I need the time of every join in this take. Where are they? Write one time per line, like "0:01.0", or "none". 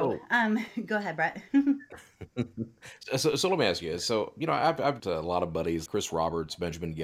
0:05.0
0:05.9